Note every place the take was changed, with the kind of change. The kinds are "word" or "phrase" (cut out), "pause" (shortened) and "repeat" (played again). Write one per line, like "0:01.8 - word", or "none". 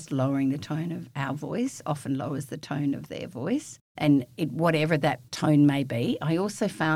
0:04.0 - word
0:05.3 - pause